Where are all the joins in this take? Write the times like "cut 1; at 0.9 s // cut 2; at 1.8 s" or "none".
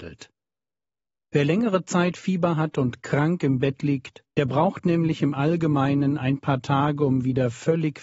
cut 1; at 4.3 s